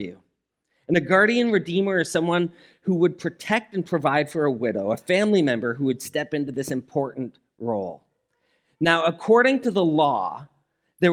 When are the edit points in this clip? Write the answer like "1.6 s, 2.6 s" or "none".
none